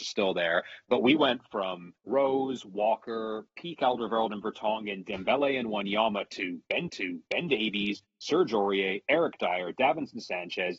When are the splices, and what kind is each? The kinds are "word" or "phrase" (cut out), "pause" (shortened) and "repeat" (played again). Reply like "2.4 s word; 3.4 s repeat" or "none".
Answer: 2.0 s pause; 6.9 s repeat